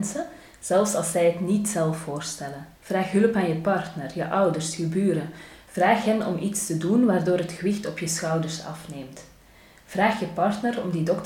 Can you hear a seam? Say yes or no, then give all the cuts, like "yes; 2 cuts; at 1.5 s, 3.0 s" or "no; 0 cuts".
yes; 1 cut; at 2.8 s